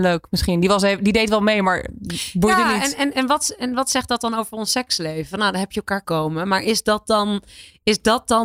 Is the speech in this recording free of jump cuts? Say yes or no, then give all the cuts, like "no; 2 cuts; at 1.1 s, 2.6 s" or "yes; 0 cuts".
no; 2 cuts; at 3.1 s, 6.0 s